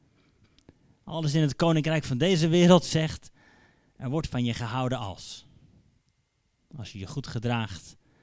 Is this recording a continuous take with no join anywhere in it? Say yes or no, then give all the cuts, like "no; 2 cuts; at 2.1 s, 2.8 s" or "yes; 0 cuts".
yes; 0 cuts